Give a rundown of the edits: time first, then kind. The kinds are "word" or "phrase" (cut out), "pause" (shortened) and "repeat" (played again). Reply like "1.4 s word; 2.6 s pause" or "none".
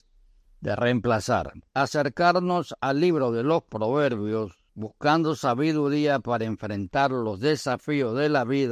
1.7 s pause; 4.7 s pause